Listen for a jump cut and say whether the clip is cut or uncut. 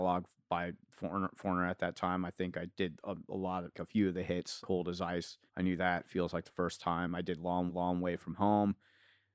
cut